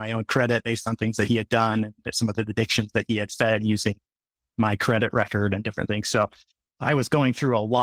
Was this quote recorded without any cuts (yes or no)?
yes